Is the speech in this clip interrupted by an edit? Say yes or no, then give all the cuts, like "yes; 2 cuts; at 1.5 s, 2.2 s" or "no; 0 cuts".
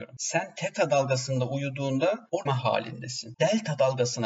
yes; 1 cut; at 2.5 s